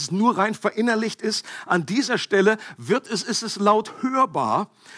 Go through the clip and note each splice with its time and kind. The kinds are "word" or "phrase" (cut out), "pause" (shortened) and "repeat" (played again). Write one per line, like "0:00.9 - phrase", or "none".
none